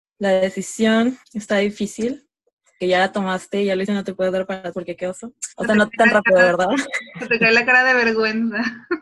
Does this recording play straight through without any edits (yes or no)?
no